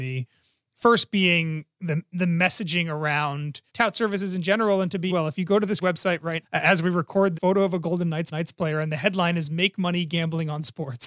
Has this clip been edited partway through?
yes; 6 cuts; at 3.7 s, 5.1 s, 5.8 s, 6.4 s, 7.3 s, 8.3 s

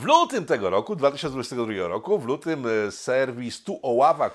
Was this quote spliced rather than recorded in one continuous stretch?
no; 0 cuts

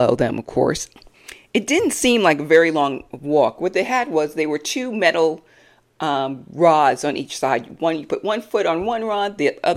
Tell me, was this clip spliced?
no; 0 cuts

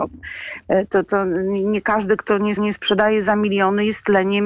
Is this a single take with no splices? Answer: no; 1 cut; at 2.6 s

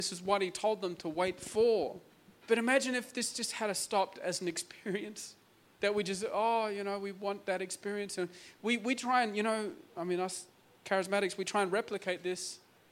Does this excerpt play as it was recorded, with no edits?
no; 3 cuts; at 2.1 s, 5.7 s, 9.9 s

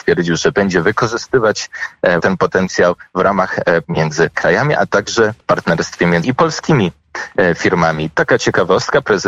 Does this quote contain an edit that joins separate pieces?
yes; 5 cuts; at 2.2 s, 3.8 s, 4.3 s, 5.4 s, 6.2 s

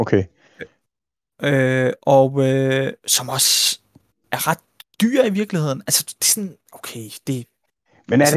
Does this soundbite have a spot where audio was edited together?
no; 0 cuts

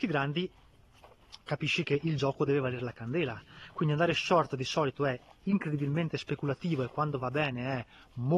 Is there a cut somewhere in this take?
no; 0 cuts

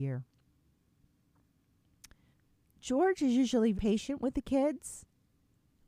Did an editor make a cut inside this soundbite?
yes; 2 cuts; at 2.3 s, 3.7 s

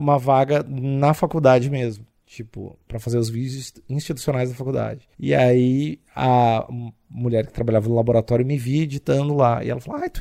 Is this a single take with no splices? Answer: no; 1 cut; at 5.1 s

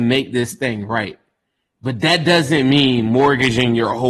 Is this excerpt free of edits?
yes; 0 cuts

